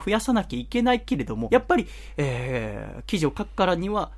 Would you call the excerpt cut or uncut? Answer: cut